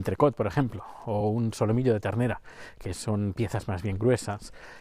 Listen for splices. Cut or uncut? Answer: uncut